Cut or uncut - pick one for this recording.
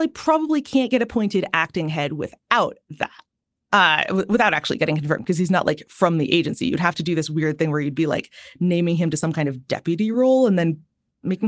uncut